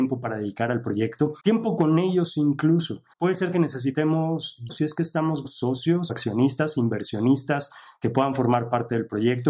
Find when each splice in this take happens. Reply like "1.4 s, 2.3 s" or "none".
1.4 s, 3.1 s, 3.5 s, 4.7 s, 5.4 s, 6.1 s